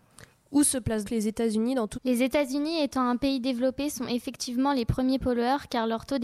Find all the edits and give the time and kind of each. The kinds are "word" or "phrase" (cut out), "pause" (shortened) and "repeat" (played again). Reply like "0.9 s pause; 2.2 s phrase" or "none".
1.0 s word; 1.9 s word